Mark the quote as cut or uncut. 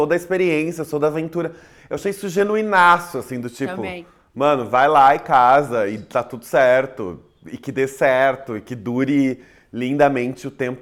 uncut